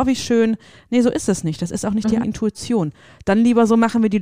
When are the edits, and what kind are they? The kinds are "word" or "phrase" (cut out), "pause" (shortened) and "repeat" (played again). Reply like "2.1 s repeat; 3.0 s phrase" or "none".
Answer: 2.2 s word